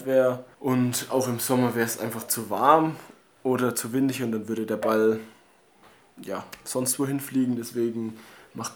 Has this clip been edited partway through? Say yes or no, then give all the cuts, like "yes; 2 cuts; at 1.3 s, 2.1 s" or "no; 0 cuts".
no; 0 cuts